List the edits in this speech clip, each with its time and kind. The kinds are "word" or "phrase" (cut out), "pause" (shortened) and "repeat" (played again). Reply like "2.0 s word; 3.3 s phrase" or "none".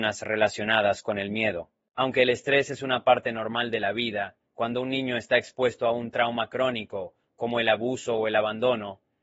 4.5 s pause